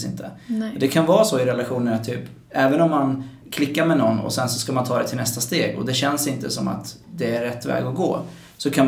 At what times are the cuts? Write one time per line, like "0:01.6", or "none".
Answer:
0:03.4

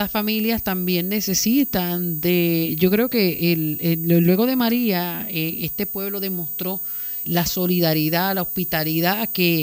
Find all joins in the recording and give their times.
0:07.2

